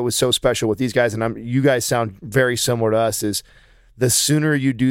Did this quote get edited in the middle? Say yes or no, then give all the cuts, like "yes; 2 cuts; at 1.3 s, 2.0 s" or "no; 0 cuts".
no; 0 cuts